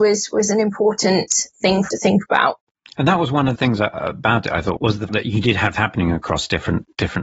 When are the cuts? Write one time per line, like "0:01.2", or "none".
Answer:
0:01.9
0:03.6
0:04.8
0:05.1
0:05.7